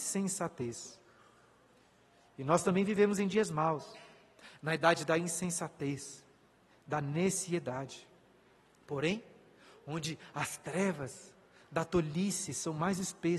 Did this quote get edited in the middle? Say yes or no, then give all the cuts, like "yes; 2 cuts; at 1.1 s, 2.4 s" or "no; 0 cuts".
no; 0 cuts